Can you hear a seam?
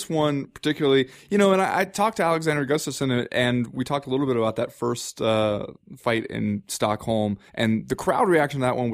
yes; 1 cut; at 7.5 s

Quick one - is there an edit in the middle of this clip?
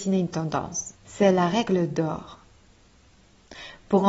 yes; 1 cut; at 1.0 s

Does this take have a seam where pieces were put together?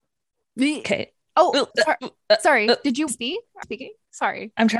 yes; 3 cuts; at 1.7 s, 3.1 s, 3.6 s

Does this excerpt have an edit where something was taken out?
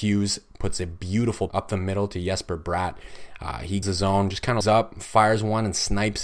yes; 3 cuts; at 1.5 s, 3.8 s, 4.6 s

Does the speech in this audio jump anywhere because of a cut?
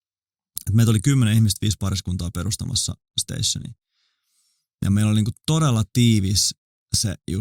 no; 0 cuts

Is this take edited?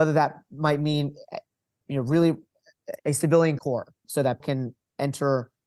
yes; 4 cuts; at 1.8 s, 3.6 s, 4.0 s, 4.4 s

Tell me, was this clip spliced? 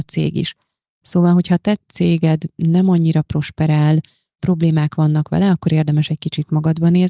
no; 0 cuts

